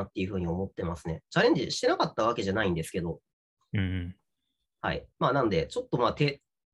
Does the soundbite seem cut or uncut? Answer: cut